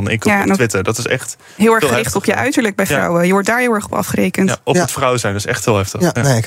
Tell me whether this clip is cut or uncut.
uncut